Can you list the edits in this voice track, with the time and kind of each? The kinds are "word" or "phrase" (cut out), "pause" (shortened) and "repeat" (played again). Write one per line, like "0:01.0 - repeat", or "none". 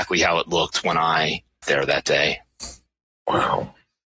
0:01.6 - word

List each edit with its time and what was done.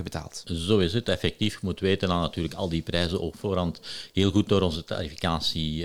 none

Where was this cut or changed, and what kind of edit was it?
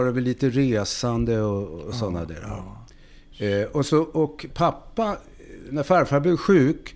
none

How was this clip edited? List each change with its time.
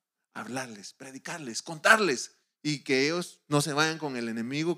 0:02.4 - pause

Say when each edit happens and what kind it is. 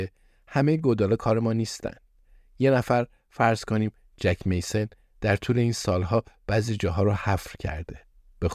none

